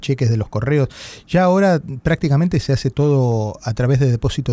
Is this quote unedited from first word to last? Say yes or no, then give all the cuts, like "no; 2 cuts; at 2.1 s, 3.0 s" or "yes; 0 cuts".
yes; 0 cuts